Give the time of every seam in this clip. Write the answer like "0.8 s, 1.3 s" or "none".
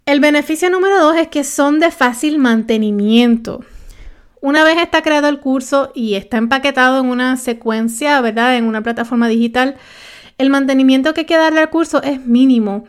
none